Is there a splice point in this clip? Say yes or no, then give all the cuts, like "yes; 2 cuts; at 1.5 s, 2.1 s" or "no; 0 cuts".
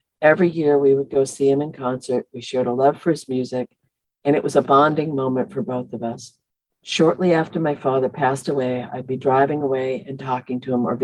no; 0 cuts